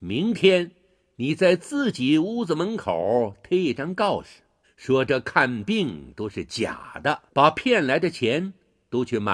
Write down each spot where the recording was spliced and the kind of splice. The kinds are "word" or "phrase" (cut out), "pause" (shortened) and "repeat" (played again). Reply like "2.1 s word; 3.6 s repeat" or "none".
4.6 s pause; 7.3 s pause